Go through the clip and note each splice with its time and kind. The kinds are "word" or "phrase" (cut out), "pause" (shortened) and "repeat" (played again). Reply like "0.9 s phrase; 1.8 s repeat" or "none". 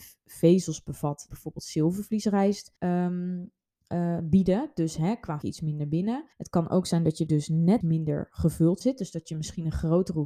1.3 s word; 2.8 s pause; 5.4 s phrase; 6.3 s pause; 7.3 s word; 7.8 s word; 8.8 s word